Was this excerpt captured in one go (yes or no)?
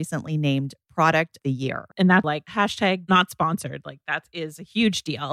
no